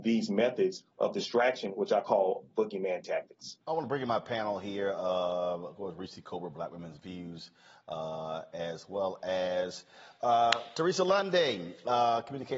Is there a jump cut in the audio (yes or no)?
yes